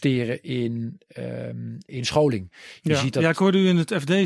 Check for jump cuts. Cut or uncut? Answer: cut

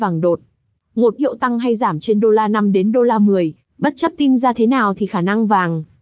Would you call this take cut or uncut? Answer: cut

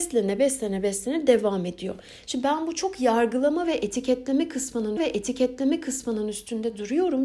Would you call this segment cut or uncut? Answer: cut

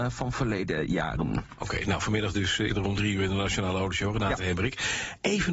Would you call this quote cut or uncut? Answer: cut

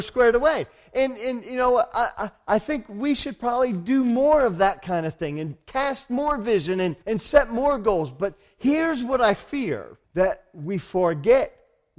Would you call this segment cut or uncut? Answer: cut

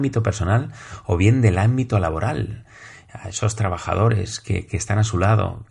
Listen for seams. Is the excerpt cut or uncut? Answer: uncut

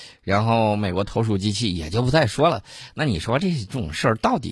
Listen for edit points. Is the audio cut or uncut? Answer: uncut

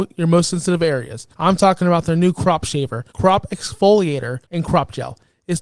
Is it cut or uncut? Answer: cut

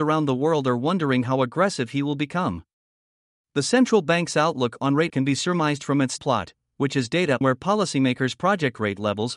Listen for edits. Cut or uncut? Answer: cut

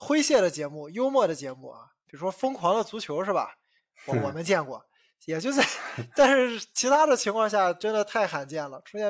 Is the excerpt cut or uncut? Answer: uncut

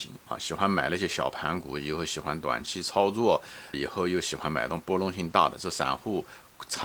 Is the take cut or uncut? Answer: cut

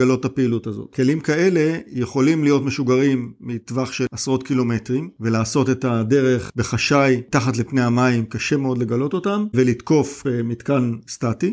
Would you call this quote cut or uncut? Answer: uncut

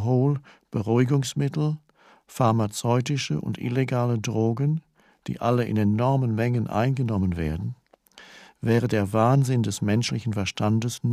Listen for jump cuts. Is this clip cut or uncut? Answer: uncut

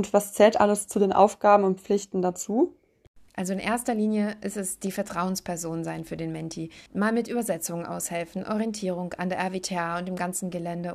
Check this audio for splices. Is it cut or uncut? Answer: cut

